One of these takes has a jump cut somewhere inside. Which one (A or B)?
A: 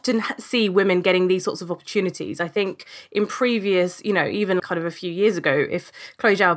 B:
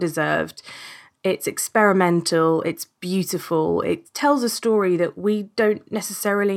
A